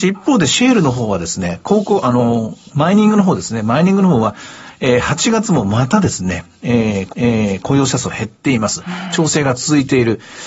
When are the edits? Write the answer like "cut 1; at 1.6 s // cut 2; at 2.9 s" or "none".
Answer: cut 1; at 7.1 s

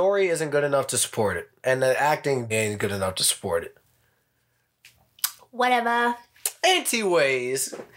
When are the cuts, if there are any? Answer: cut 1; at 2.5 s

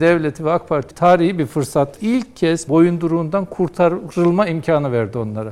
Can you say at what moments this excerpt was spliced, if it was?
cut 1; at 0.9 s // cut 2; at 2.0 s // cut 3; at 2.7 s

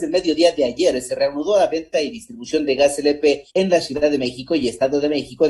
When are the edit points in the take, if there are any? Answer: cut 1; at 3.5 s

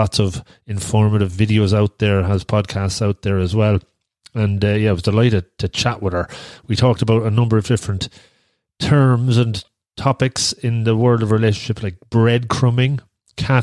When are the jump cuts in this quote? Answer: none

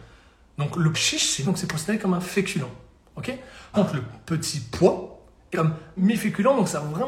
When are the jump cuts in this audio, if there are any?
cut 1; at 0.9 s // cut 2; at 1.4 s // cut 3; at 3.7 s // cut 4; at 5.5 s // cut 5; at 6.0 s

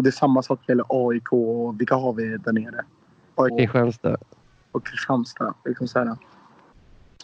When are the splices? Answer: cut 1; at 3.5 s

